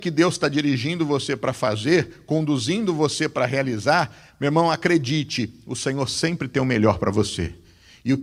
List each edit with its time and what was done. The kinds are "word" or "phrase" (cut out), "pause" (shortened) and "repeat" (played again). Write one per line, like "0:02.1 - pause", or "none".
none